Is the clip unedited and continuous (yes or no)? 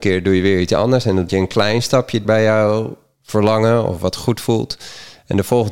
no